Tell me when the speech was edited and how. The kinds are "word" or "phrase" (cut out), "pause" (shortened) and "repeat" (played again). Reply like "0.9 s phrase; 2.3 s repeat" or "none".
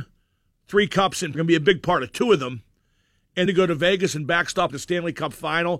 1.3 s word; 3.5 s word; 4.7 s phrase